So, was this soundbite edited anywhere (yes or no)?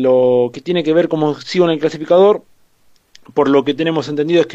no